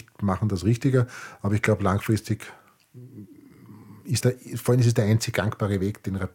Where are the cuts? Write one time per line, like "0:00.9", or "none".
0:04.2